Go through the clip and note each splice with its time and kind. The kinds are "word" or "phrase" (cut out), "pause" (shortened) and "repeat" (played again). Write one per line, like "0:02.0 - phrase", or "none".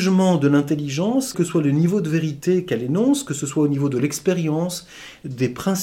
0:01.3 - word